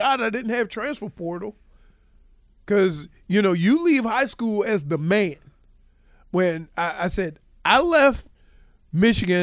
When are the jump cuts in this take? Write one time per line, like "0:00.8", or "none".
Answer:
none